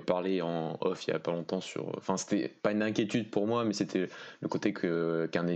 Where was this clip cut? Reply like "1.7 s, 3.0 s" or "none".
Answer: 2.6 s